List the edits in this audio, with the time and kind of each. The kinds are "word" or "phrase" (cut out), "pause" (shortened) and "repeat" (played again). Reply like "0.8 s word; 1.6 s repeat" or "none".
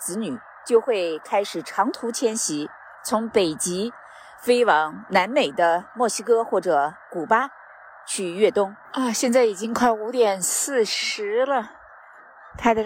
2.9 s pause; 8.9 s pause